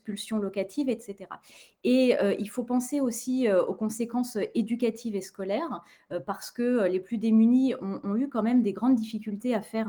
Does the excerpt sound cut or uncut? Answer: uncut